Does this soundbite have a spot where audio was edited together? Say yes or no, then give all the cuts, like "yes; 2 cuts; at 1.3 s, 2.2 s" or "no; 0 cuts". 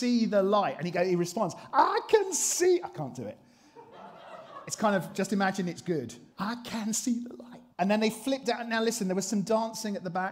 yes; 2 cuts; at 6.3 s, 7.7 s